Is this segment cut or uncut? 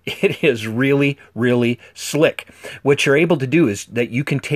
uncut